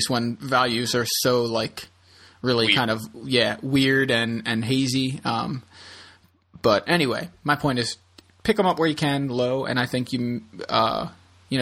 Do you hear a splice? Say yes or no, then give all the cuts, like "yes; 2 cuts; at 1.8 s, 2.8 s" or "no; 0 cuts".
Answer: no; 0 cuts